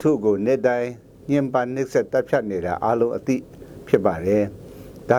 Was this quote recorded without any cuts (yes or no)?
yes